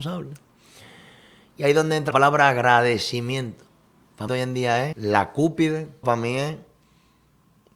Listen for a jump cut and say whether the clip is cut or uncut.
cut